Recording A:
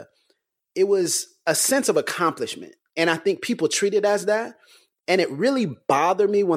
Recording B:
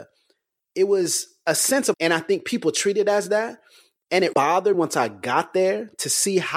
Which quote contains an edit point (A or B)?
B